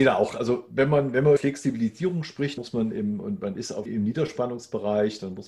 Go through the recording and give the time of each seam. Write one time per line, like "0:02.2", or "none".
0:01.4
0:02.6
0:03.9